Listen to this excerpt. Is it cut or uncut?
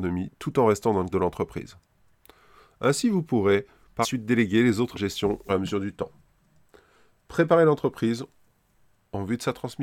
cut